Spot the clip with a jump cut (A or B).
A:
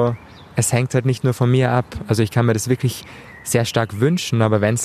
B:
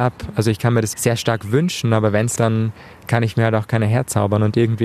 B